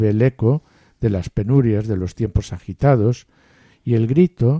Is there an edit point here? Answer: no; 0 cuts

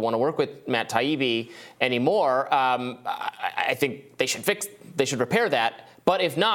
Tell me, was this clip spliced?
no; 0 cuts

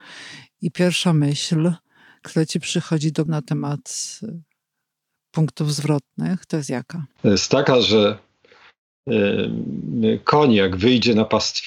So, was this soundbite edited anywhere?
yes; 1 cut; at 3.3 s

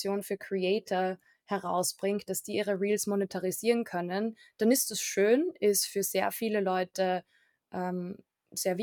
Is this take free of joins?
yes; 0 cuts

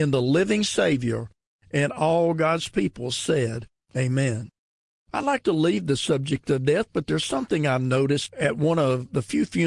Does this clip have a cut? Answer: no; 0 cuts

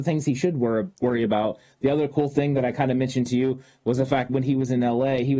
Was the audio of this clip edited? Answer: yes; 1 cut; at 4.3 s

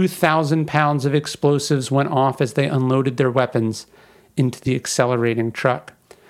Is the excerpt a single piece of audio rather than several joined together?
yes; 0 cuts

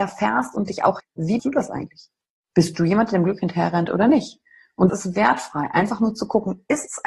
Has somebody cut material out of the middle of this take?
yes; 3 cuts; at 1.0 s, 1.4 s, 4.9 s

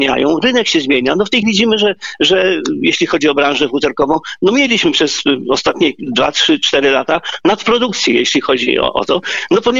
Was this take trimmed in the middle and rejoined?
yes; 1 cut; at 1.4 s

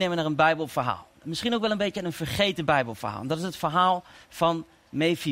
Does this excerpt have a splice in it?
no; 0 cuts

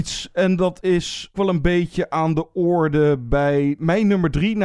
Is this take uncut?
no; 1 cut; at 1.3 s

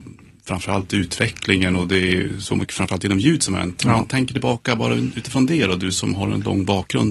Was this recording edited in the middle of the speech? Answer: no; 0 cuts

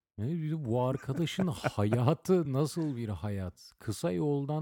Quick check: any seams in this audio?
no; 0 cuts

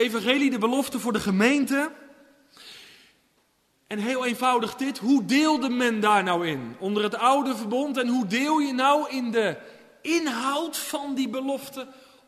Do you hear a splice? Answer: no; 0 cuts

